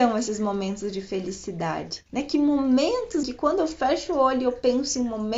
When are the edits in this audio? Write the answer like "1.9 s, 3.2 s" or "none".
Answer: 2.1 s, 3.2 s